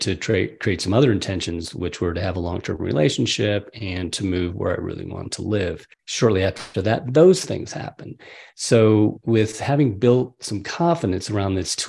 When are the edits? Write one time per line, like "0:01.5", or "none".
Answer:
0:05.9